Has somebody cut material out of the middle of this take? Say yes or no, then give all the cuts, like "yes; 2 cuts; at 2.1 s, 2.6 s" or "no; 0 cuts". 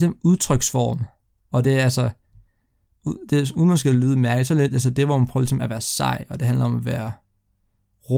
no; 0 cuts